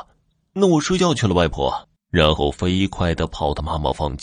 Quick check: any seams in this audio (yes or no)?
yes